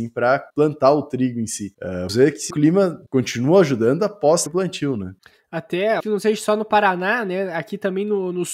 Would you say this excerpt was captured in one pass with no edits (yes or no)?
no